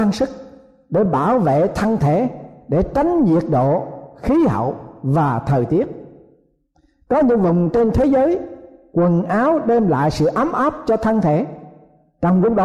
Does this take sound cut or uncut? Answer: uncut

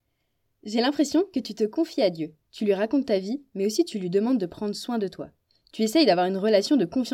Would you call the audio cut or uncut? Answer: uncut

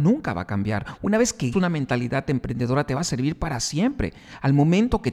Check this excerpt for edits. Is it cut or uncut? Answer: cut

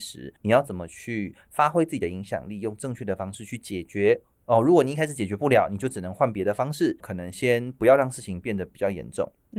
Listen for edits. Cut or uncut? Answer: cut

